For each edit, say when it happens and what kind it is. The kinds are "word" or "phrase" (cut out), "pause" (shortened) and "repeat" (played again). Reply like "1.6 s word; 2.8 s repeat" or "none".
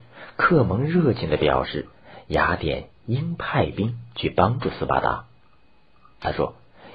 none